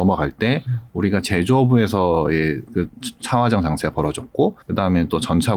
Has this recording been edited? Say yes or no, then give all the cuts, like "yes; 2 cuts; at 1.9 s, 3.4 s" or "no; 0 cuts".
yes; 1 cut; at 4.6 s